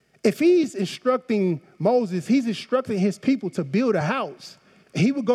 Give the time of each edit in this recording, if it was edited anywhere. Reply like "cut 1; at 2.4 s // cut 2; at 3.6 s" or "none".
none